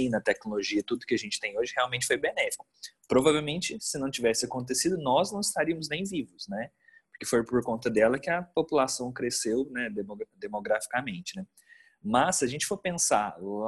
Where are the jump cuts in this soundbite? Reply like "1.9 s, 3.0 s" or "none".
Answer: none